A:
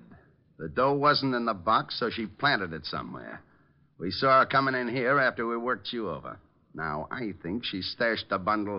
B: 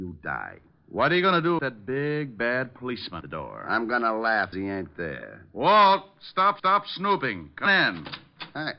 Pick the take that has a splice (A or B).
B